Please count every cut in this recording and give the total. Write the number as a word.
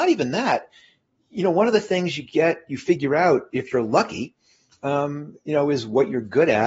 zero